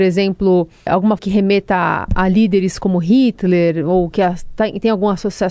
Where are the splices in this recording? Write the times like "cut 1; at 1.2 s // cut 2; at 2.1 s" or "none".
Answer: cut 1; at 1.2 s